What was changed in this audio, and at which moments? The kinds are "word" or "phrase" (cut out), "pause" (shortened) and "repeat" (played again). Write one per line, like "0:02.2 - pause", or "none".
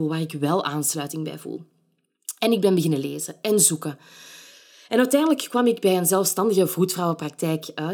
none